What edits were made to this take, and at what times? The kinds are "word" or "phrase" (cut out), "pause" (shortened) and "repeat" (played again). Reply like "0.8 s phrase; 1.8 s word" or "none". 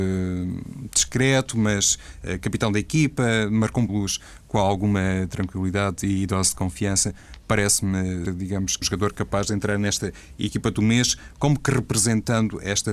3.9 s phrase; 8.2 s word; 8.8 s word